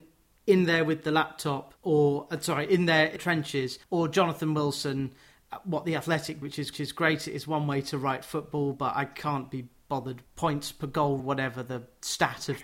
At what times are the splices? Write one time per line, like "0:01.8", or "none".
0:01.8
0:03.2
0:03.8
0:06.4
0:06.7
0:10.3
0:11.2